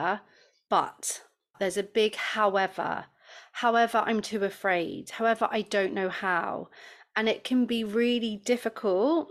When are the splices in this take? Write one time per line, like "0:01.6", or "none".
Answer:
none